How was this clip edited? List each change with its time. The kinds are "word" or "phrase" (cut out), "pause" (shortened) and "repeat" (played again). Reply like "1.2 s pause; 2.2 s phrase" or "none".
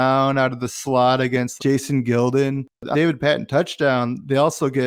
1.6 s word; 2.9 s word